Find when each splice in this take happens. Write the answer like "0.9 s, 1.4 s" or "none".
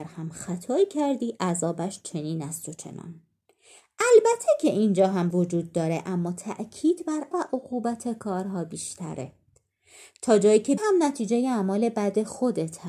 5.3 s, 7.3 s, 10.8 s